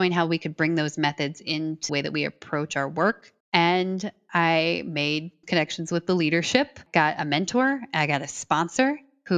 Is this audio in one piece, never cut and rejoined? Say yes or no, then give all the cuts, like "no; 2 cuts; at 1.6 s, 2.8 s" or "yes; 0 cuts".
no; 3 cuts; at 1.9 s, 3.4 s, 5.4 s